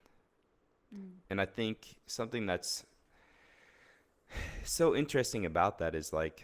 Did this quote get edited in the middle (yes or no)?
yes